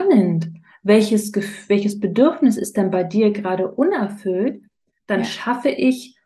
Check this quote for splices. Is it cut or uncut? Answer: uncut